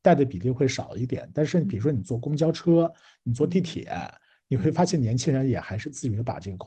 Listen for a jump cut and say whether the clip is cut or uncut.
uncut